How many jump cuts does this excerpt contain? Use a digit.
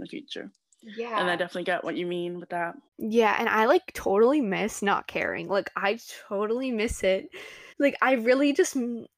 2